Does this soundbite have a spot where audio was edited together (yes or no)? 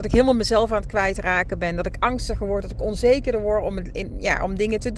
no